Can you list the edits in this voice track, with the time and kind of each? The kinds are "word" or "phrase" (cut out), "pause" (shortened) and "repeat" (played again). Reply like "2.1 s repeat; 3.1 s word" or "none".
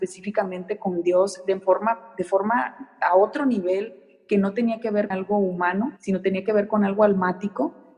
5.1 s word; 6.0 s pause